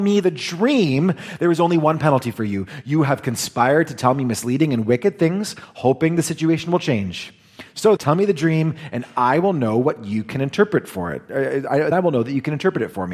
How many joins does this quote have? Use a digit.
2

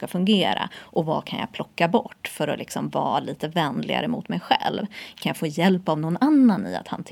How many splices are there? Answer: 0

